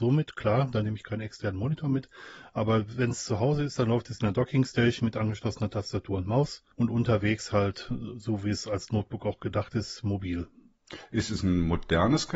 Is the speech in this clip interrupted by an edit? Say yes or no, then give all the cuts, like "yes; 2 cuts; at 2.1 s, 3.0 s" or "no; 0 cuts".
yes; 1 cut; at 6.7 s